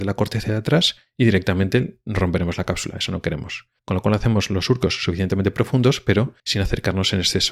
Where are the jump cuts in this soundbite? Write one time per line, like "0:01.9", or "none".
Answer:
0:03.8
0:06.4